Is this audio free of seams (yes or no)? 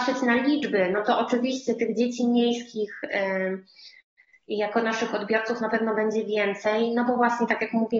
yes